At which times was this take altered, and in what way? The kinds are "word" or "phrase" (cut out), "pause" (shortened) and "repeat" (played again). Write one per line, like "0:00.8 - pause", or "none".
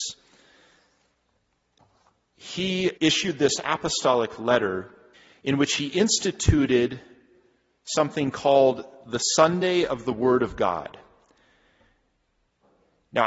0:03.0 - pause
0:05.1 - pause